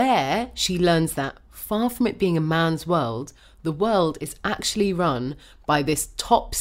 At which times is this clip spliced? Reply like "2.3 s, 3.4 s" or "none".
none